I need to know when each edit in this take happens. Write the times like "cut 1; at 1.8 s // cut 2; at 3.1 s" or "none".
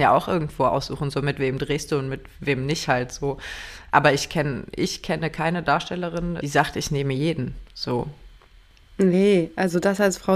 none

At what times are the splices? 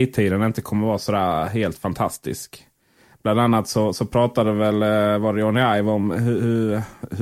none

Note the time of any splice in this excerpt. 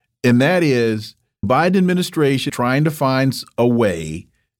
cut 1; at 1.4 s // cut 2; at 2.5 s

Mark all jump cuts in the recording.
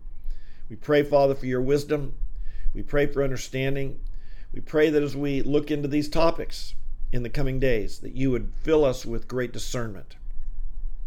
none

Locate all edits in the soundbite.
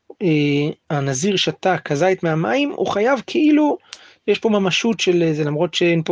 none

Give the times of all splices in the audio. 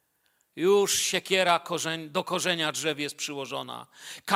none

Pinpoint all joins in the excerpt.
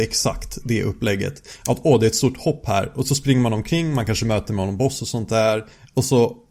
none

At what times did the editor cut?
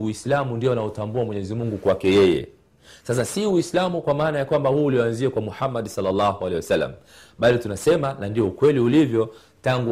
none

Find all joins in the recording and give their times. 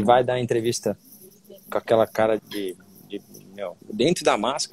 cut 1; at 2.4 s // cut 2; at 3.8 s

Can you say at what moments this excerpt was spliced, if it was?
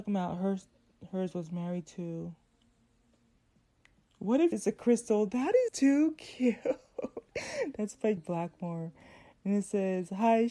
cut 1; at 4.5 s // cut 2; at 5.7 s // cut 3; at 8.2 s

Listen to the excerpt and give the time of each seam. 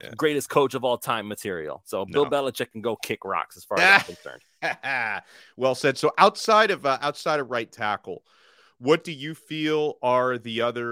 none

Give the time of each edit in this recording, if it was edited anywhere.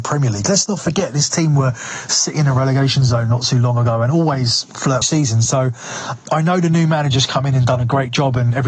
cut 1; at 5.0 s

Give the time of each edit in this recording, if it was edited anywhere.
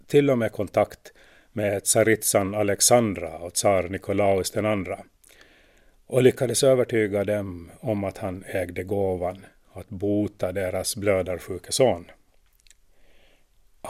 none

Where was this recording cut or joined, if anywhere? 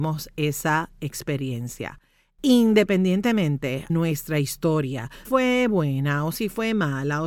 cut 1; at 3.9 s // cut 2; at 5.2 s

